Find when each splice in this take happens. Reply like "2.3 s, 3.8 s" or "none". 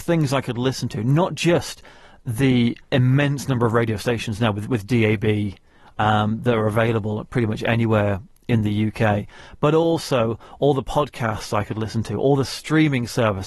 2.8 s